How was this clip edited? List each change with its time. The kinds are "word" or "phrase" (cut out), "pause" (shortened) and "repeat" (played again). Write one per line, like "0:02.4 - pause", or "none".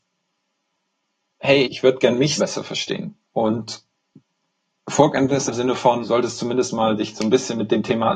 0:01.6 - word
0:02.4 - word
0:03.2 - pause
0:05.5 - word
0:06.0 - word